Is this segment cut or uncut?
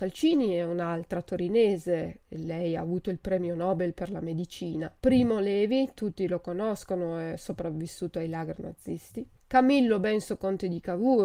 cut